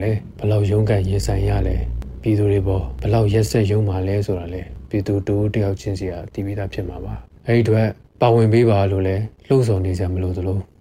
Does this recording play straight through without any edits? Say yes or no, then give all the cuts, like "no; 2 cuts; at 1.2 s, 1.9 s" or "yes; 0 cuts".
no; 1 cut; at 9.4 s